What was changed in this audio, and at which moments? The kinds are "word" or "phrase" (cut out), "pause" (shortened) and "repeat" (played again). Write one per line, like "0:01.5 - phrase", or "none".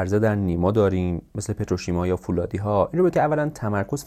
0:03.1 - word